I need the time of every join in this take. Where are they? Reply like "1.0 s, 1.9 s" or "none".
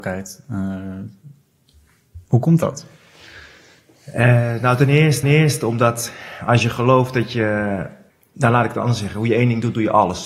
5.2 s, 8.1 s